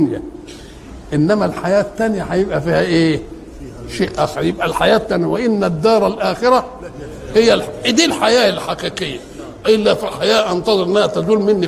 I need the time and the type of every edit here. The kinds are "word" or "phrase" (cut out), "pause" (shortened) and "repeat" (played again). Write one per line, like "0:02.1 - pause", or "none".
none